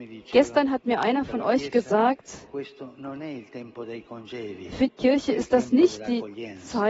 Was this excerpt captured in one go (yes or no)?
no